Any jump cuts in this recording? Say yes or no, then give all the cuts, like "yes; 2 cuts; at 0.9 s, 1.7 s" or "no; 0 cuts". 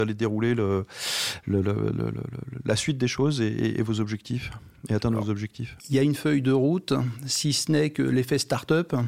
yes; 1 cut; at 5.8 s